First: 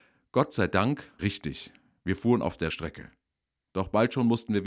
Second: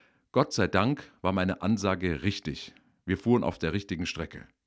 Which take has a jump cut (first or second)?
first